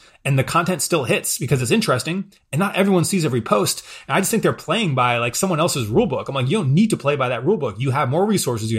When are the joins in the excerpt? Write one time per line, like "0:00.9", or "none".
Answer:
none